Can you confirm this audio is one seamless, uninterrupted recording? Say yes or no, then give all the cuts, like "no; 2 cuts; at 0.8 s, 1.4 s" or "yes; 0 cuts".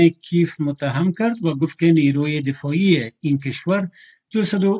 yes; 0 cuts